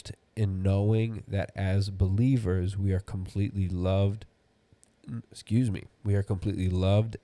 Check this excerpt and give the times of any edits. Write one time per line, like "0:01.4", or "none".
0:05.2